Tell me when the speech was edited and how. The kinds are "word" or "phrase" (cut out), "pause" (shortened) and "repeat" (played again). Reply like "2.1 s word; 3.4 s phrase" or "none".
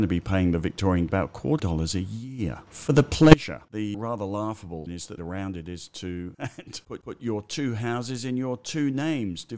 1.1 s word; 1.6 s phrase; 3.9 s word; 4.9 s word; 5.2 s phrase; 6.3 s word; 7.0 s repeat